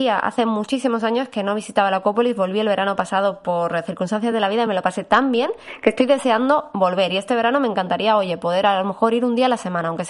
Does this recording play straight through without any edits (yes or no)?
yes